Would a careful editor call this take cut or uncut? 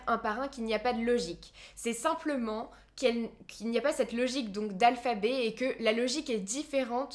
uncut